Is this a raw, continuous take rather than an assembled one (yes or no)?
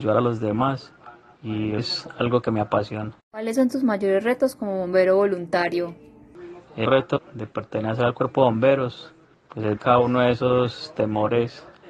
no